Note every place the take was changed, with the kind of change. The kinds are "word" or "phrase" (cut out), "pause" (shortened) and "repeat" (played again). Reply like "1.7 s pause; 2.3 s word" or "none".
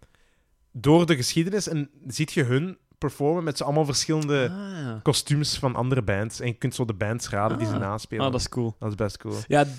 none